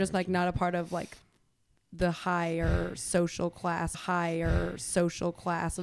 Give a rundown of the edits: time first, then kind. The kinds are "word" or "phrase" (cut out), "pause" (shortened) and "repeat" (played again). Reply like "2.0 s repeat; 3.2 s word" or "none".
3.9 s repeat